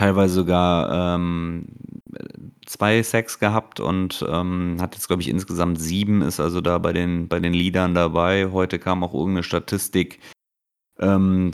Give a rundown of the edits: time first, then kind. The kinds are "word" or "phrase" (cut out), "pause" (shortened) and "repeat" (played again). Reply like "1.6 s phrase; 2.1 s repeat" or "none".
none